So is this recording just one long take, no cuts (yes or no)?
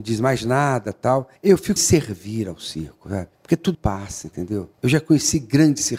no